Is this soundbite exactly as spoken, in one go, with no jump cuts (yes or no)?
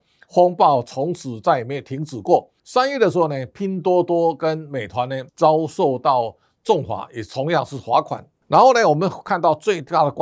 no